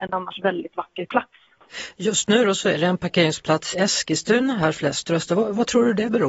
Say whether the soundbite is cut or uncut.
cut